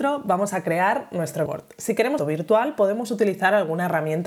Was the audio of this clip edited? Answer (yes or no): yes